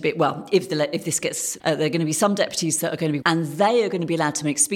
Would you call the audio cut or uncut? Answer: cut